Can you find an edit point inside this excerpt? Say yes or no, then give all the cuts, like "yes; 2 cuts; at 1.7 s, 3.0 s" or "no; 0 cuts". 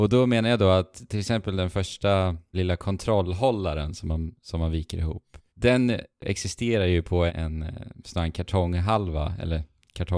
yes; 3 cuts; at 2.5 s, 5.5 s, 7.3 s